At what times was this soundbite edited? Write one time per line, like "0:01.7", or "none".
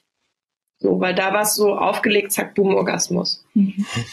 none